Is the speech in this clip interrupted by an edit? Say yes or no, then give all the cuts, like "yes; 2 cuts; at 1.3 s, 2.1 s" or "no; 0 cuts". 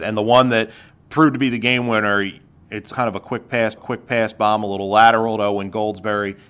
yes; 2 cuts; at 2.9 s, 3.8 s